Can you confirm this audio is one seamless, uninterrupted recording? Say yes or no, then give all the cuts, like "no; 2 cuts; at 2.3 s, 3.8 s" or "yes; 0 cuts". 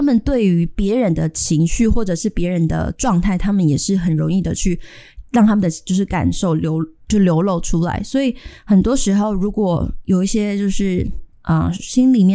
no; 1 cut; at 5.3 s